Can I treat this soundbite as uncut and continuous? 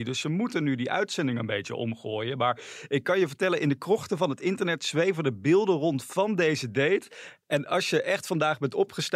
yes; 0 cuts

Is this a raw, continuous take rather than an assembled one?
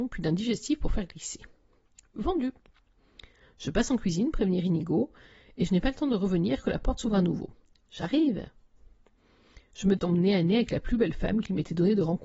no; 1 cut; at 10.0 s

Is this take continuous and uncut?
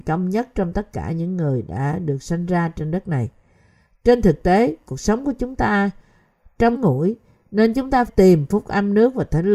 no; 2 cuts; at 6.7 s, 8.1 s

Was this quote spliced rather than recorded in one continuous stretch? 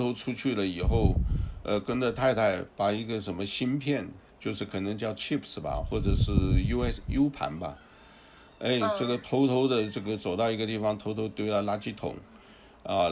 no; 0 cuts

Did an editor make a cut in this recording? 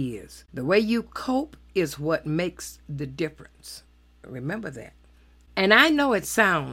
no; 0 cuts

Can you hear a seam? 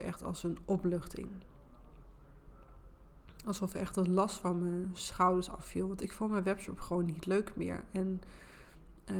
no; 0 cuts

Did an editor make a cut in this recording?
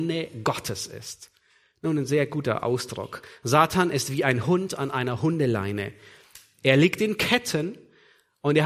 no; 0 cuts

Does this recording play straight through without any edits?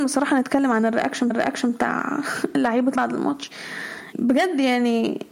no; 3 cuts; at 1.3 s, 3.0 s, 4.1 s

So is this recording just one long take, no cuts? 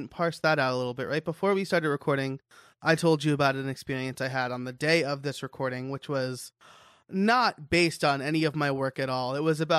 yes; 0 cuts

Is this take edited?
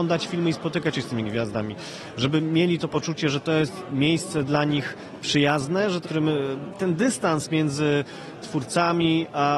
yes; 1 cut; at 6.0 s

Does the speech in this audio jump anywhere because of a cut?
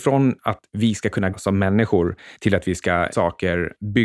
yes; 2 cuts; at 1.3 s, 3.1 s

